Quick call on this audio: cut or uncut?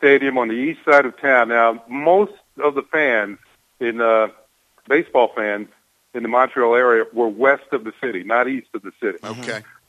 uncut